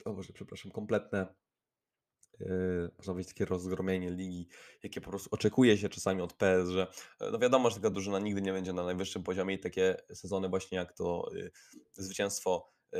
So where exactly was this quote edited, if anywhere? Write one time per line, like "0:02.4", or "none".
none